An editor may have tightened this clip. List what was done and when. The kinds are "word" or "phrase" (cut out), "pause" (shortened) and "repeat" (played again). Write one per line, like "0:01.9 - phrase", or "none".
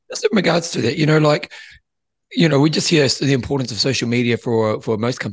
none

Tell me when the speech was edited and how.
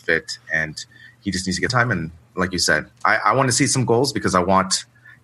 0:01.7 - phrase

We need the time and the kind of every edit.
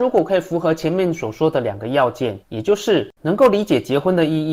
0:02.4 - pause

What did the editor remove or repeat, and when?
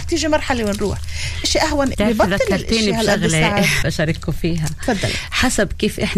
0:01.4 - word
0:01.9 - word
0:03.8 - word

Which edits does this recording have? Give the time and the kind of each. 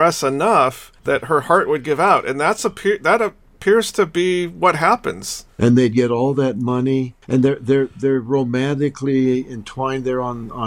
0:01.0 - pause
0:05.5 - pause
0:07.2 - pause

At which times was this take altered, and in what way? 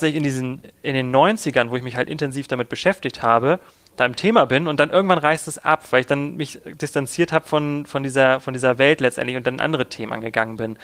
none

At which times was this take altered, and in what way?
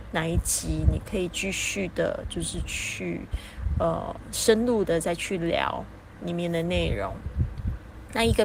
none

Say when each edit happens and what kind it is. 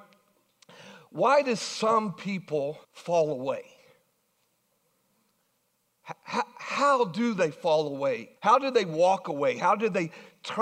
0:02.8 - pause
0:08.4 - pause

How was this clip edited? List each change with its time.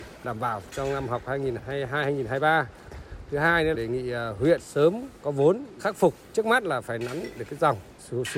0:03.7 - word
0:04.6 - word
0:05.8 - word

